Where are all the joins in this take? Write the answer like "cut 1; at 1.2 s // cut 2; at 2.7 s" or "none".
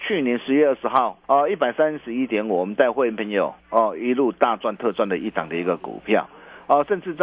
cut 1; at 1.2 s // cut 2; at 3.6 s